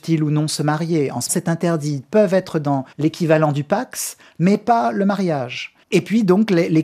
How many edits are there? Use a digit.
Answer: 3